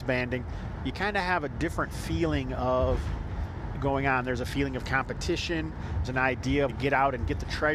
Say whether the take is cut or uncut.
cut